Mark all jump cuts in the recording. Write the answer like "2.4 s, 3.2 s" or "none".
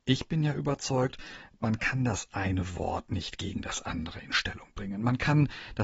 none